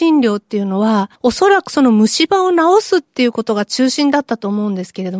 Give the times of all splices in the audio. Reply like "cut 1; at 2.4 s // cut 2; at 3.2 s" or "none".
cut 1; at 1.1 s